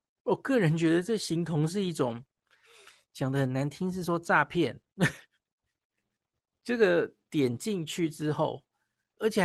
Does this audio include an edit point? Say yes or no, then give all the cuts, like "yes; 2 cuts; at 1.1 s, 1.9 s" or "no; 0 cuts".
no; 0 cuts